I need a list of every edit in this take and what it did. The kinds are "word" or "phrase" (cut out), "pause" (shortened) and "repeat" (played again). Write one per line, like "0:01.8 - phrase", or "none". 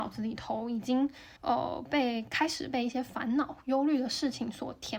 0:01.4 - pause